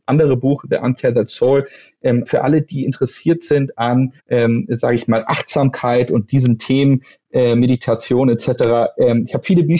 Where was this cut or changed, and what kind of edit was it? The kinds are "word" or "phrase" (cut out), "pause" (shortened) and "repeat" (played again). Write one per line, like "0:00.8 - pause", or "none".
0:02.3 - word
0:04.2 - pause